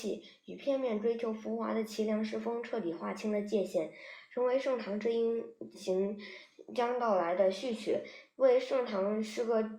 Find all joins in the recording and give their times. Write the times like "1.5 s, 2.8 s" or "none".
5.7 s